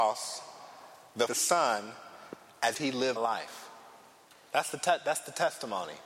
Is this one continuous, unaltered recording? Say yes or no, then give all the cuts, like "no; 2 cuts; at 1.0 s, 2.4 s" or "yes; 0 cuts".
no; 3 cuts; at 1.3 s, 2.7 s, 3.2 s